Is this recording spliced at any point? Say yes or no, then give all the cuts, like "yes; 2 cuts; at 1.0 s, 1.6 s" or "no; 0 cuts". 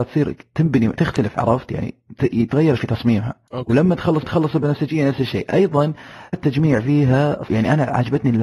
yes; 6 cuts; at 0.9 s, 2.8 s, 3.5 s, 4.2 s, 6.3 s, 7.5 s